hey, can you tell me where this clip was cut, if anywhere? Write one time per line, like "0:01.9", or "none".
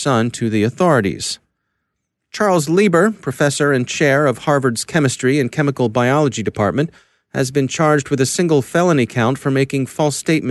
none